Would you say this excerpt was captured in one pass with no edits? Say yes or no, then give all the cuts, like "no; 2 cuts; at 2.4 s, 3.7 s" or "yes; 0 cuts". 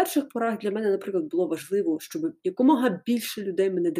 yes; 0 cuts